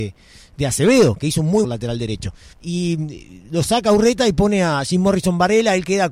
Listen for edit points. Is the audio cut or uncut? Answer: cut